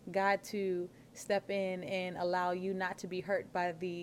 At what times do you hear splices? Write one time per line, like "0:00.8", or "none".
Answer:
none